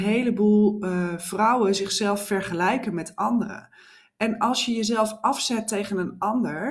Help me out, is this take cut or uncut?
uncut